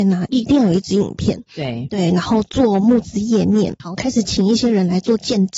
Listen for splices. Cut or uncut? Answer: cut